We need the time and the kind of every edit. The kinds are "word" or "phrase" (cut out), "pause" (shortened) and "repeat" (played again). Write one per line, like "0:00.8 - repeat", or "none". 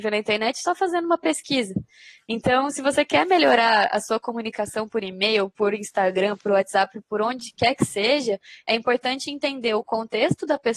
none